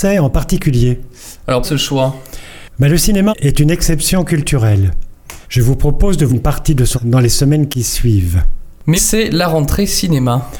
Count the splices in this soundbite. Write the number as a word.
six